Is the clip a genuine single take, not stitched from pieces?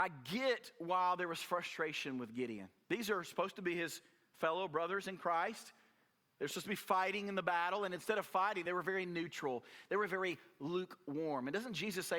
yes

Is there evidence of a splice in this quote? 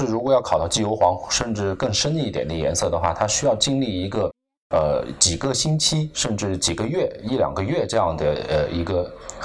no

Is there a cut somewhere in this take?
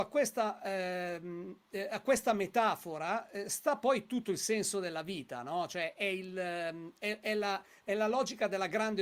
no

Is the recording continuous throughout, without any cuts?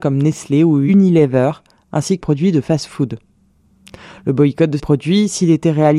no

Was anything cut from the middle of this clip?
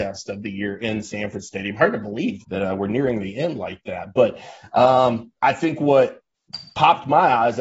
yes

